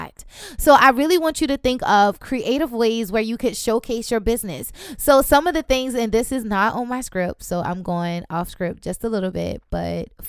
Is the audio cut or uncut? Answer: uncut